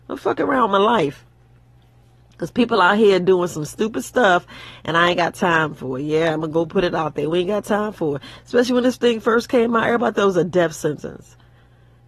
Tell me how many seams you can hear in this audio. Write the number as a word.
zero